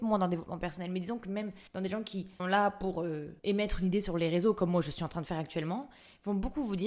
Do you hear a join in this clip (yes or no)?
yes